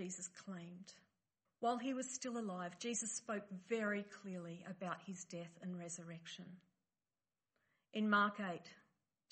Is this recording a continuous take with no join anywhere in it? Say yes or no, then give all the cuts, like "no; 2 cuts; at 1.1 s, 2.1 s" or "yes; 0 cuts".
no; 1 cut; at 1.5 s